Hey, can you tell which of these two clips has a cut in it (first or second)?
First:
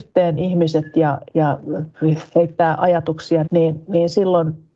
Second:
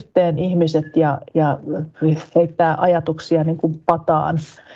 first